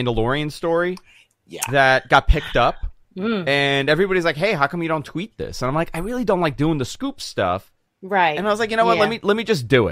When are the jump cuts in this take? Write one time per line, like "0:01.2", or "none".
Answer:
none